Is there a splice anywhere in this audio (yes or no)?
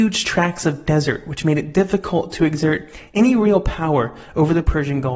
no